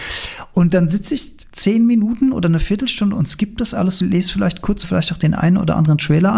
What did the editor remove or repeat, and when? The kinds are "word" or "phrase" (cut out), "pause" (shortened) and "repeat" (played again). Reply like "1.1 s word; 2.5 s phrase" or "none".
1.5 s pause; 4.0 s phrase; 4.8 s phrase